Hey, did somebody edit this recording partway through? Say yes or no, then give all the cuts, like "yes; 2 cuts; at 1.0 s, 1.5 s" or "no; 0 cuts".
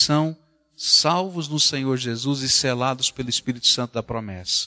no; 0 cuts